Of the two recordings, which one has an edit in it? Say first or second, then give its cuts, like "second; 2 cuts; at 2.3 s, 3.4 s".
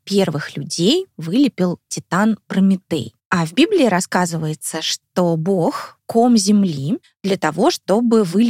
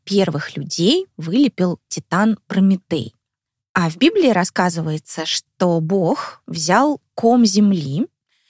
first; 3 cuts; at 3.2 s, 6.0 s, 7.0 s